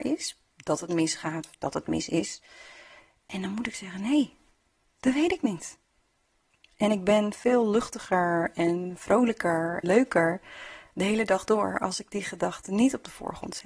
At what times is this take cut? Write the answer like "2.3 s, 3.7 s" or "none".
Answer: 9.8 s